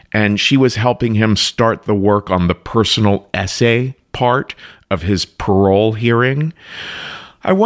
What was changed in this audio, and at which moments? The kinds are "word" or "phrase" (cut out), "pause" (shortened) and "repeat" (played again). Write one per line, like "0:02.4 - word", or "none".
none